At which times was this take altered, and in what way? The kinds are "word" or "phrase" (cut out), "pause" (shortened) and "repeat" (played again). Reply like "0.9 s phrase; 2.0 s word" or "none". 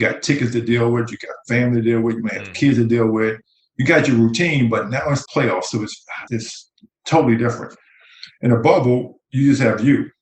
5.3 s word; 6.3 s word